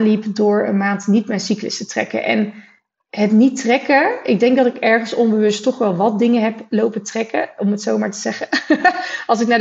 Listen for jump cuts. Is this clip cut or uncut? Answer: uncut